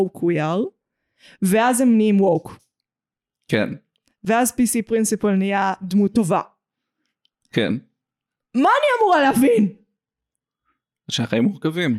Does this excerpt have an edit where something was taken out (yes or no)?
no